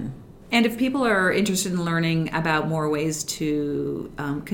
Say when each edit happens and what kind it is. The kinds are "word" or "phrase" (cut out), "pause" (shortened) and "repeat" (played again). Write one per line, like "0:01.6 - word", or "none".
none